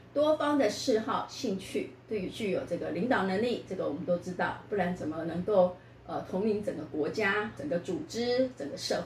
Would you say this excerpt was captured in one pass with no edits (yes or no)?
no